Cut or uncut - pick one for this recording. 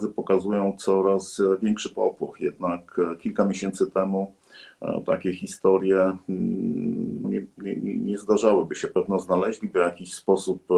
cut